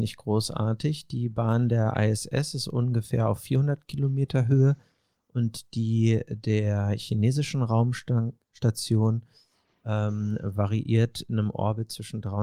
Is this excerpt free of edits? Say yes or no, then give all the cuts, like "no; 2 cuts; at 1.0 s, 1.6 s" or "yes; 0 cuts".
yes; 0 cuts